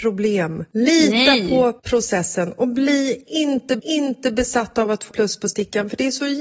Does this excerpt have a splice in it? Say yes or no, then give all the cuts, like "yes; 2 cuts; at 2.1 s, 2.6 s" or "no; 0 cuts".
yes; 3 cuts; at 1.8 s, 3.8 s, 5.1 s